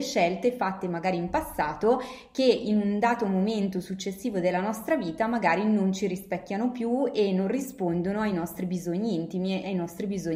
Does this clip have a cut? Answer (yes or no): no